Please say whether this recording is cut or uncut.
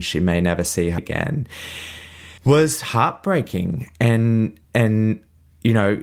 cut